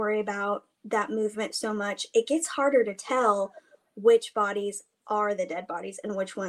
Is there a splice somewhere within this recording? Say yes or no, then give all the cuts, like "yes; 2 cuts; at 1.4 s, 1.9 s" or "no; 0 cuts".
no; 0 cuts